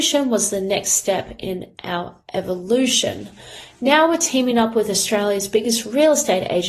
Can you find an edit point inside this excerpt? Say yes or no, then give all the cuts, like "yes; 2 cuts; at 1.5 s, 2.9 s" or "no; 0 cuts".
no; 0 cuts